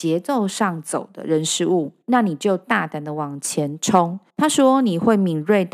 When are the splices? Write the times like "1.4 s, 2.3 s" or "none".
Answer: 2.0 s, 4.3 s